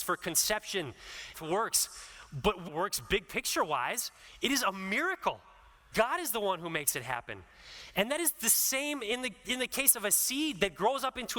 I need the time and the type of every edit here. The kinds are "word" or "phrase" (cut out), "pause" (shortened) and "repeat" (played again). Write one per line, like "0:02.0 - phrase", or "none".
0:01.3 - phrase
0:02.7 - phrase
0:05.9 - word